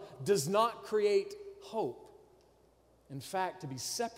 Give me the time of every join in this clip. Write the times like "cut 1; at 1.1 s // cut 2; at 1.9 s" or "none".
none